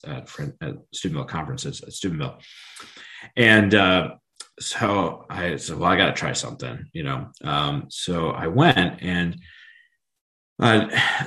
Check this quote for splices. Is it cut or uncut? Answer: uncut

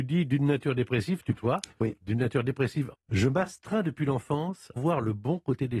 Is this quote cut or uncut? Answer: cut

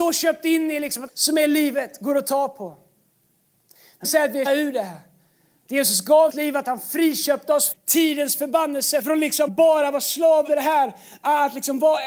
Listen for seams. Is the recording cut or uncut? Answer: cut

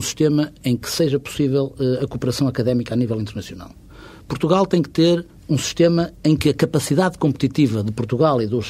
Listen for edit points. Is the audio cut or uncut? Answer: uncut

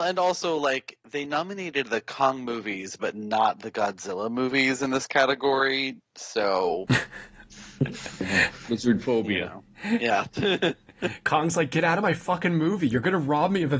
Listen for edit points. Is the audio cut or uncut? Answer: uncut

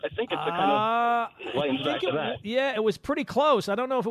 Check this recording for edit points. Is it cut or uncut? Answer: uncut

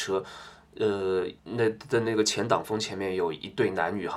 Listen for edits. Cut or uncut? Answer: cut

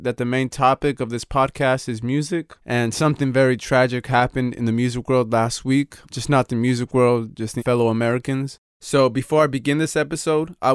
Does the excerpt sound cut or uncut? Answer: cut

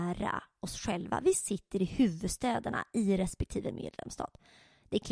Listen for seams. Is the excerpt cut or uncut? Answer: uncut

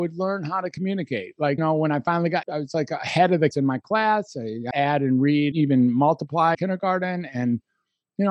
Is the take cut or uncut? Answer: cut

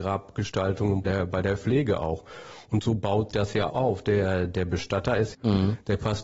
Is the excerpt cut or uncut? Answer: cut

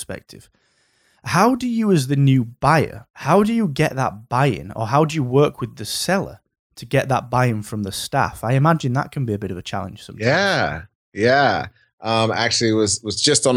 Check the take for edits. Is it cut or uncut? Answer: cut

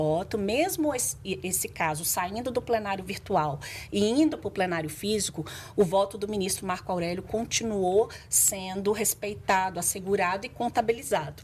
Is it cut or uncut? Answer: uncut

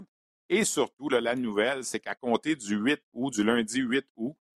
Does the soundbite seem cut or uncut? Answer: uncut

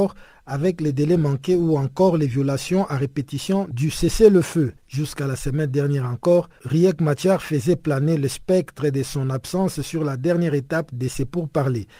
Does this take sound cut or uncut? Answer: cut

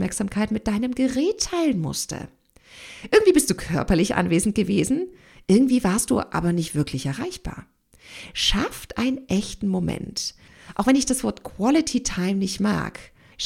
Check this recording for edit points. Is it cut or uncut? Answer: uncut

